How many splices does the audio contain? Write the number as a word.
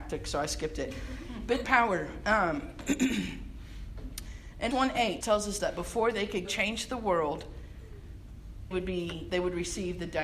seven